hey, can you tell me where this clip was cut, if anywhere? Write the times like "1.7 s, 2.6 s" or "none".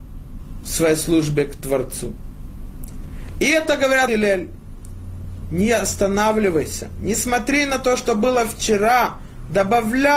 4.1 s

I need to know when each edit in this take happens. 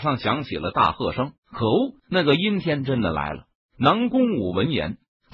1.4 s, 2.0 s

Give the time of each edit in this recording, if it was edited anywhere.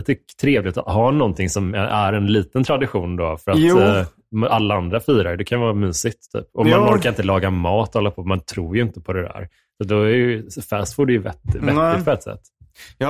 none

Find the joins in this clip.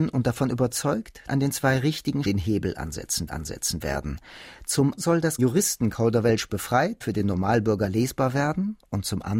1.3 s, 2.2 s, 3.3 s, 5.0 s, 5.4 s, 7.0 s

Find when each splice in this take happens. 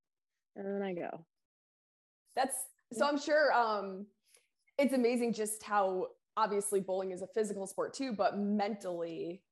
none

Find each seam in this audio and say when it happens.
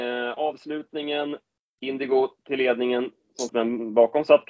1.6 s, 3.5 s

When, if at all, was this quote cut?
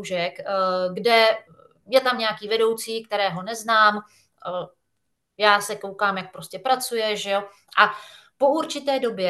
none

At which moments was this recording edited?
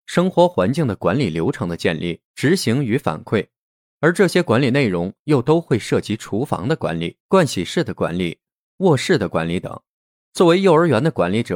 2.3 s, 7.2 s

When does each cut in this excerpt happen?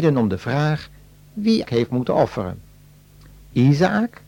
1.6 s

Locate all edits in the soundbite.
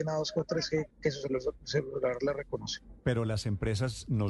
0.9 s

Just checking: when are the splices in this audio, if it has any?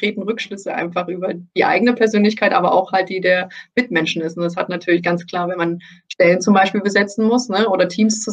none

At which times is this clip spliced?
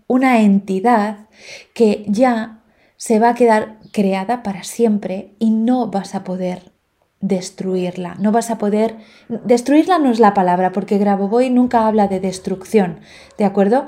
none

